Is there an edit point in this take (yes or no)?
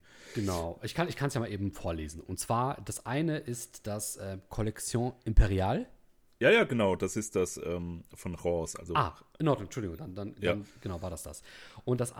no